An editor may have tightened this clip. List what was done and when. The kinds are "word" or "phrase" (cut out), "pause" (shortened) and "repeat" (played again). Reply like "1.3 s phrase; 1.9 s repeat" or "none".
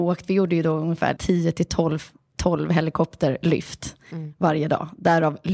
1.2 s word